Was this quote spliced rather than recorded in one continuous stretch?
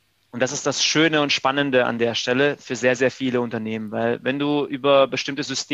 no; 0 cuts

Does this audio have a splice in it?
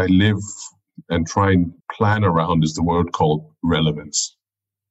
yes; 1 cut; at 1.8 s

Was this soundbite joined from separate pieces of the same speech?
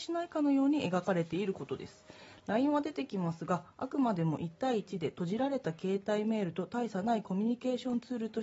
no; 0 cuts

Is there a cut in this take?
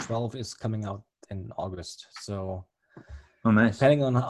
no; 0 cuts

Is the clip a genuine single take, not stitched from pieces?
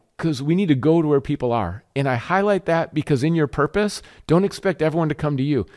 yes; 0 cuts

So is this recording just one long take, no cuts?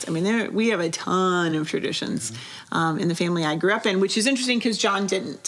yes; 0 cuts

